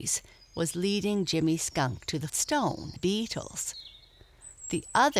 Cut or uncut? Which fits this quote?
cut